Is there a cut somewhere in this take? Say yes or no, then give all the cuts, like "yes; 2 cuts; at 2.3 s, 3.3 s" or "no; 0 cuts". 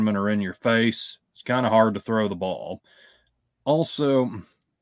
no; 0 cuts